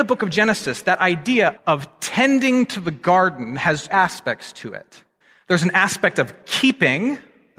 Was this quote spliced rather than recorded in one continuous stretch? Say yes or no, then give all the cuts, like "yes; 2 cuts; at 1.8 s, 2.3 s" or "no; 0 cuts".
yes; 3 cuts; at 1.6 s, 3.9 s, 5.2 s